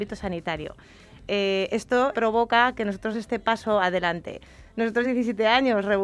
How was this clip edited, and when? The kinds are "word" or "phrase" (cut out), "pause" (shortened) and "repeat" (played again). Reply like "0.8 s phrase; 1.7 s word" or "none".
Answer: 2.1 s phrase; 3.1 s word; 5.0 s word